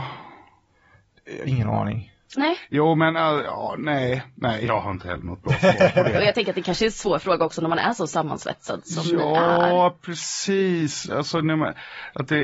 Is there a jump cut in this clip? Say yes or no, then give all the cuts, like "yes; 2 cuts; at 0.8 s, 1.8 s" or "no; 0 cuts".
no; 0 cuts